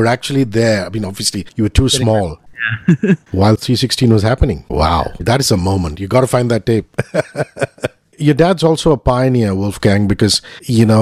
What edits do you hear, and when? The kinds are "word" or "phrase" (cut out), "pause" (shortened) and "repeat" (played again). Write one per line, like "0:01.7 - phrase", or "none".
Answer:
0:08.1 - pause